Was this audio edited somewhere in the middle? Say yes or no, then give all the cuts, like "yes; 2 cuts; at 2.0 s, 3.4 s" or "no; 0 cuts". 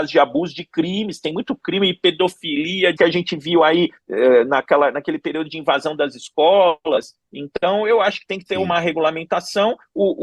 yes; 1 cut; at 3.0 s